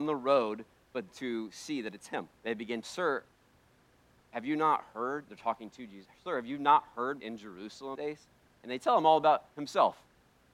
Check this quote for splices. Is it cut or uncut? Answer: cut